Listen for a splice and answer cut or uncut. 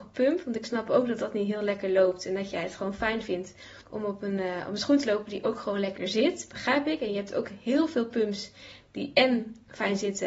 cut